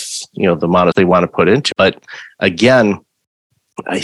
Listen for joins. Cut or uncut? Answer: cut